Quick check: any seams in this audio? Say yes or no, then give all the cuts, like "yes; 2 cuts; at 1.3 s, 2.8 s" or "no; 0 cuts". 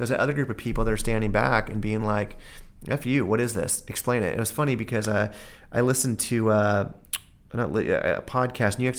no; 0 cuts